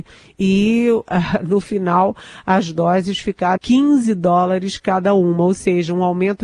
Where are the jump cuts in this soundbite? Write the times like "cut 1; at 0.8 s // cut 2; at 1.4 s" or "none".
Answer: cut 1; at 3.6 s